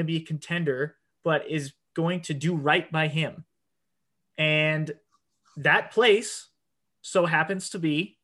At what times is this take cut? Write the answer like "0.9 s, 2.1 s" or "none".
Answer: none

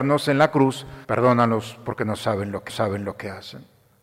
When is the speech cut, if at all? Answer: 1.0 s, 2.7 s

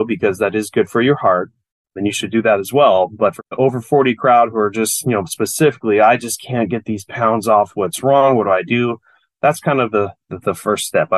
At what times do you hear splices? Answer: none

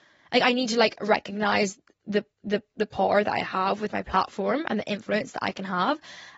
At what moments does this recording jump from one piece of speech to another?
2.3 s

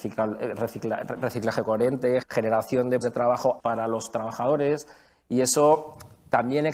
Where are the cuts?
2.2 s, 3.0 s, 3.6 s

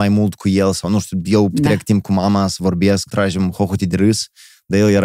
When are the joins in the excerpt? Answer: 1.5 s, 3.1 s

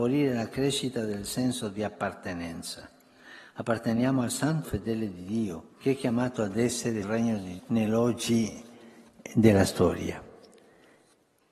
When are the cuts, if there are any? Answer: 4.6 s, 5.7 s, 7.0 s, 7.6 s

